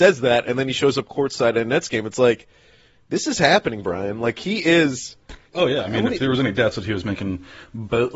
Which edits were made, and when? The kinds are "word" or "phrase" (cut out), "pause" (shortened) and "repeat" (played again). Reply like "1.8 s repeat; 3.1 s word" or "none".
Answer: none

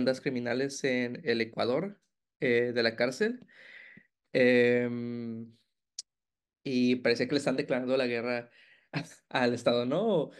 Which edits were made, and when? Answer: none

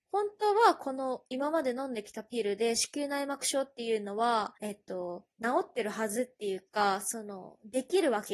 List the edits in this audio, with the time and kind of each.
4.6 s pause; 5.3 s pause

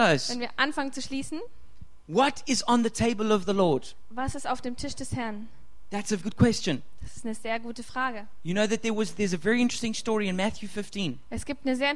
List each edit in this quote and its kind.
6.2 s word

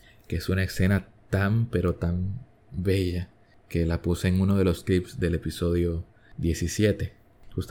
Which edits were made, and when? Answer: none

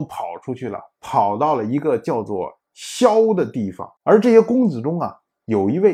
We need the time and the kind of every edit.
2.6 s pause; 4.0 s pause

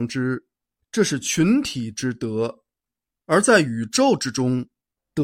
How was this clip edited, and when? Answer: none

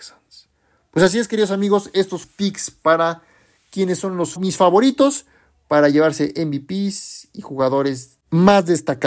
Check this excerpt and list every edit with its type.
2.2 s phrase; 4.4 s word

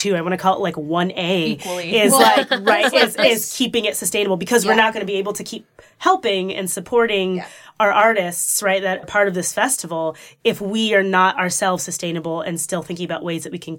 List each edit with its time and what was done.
9.0 s word

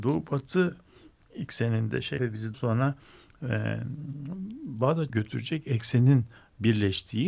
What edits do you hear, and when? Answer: 2.2 s word; 2.5 s word; 5.1 s word

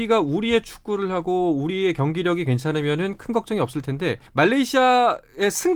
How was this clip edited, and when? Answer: 4.3 s pause

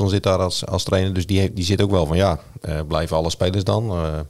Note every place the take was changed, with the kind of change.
none

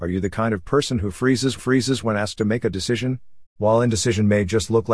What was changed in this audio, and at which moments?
1.6 s repeat; 3.5 s pause

